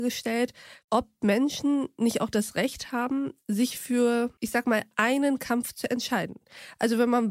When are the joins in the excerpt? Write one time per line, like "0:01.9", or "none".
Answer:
0:04.4